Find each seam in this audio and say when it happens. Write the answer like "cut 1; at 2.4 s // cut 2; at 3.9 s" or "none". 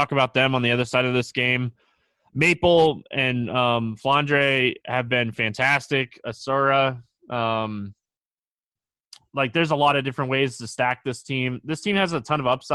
none